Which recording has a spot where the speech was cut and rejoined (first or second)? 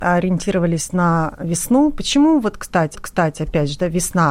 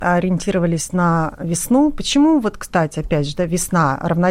first